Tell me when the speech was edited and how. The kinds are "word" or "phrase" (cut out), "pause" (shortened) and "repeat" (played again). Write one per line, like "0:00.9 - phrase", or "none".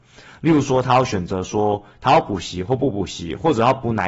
none